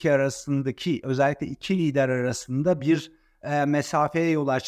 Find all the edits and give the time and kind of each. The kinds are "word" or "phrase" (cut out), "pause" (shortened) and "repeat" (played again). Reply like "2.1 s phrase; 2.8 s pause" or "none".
none